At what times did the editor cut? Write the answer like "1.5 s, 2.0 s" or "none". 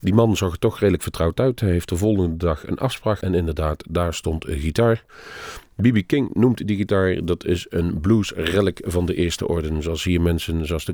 3.2 s

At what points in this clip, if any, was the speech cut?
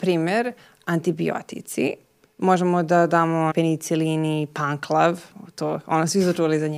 3.5 s

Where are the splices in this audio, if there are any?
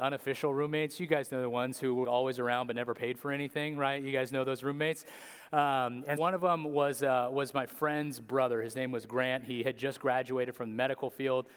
2.0 s, 6.2 s

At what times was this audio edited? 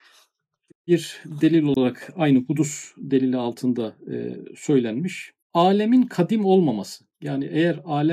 5.4 s, 7.1 s

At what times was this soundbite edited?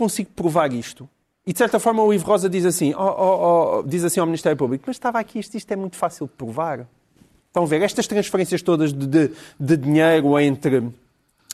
none

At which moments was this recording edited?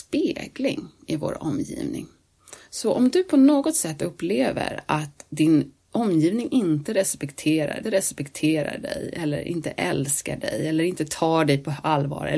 7.8 s

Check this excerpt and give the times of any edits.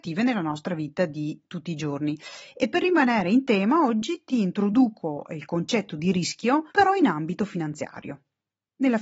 6.7 s

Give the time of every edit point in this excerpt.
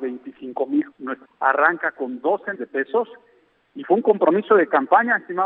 0.9 s, 1.2 s, 2.5 s

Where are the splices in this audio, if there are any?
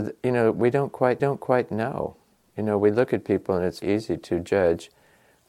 1.2 s, 3.8 s

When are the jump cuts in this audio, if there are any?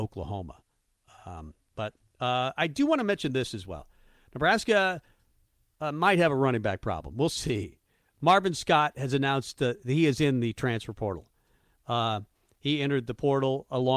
none

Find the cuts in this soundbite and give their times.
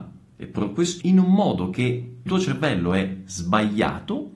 1.0 s, 2.3 s

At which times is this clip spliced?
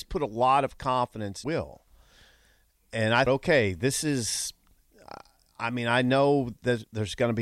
1.4 s, 3.3 s

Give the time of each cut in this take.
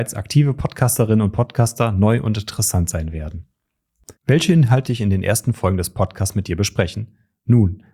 4.2 s, 4.9 s

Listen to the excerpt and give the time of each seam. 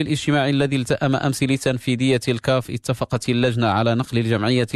none

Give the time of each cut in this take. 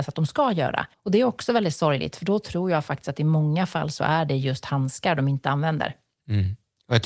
0.9 s

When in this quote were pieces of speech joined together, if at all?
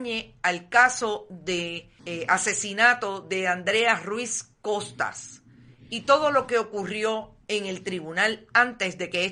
2.0 s, 7.4 s

